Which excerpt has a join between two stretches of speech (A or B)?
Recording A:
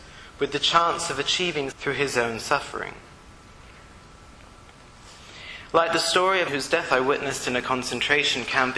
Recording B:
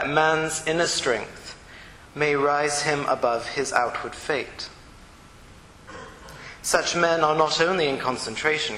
A